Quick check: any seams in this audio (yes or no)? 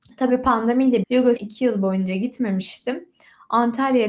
yes